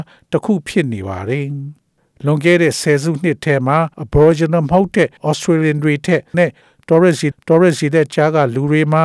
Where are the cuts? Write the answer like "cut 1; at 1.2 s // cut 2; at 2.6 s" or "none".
cut 1; at 3.9 s // cut 2; at 5.2 s // cut 3; at 6.3 s // cut 4; at 7.3 s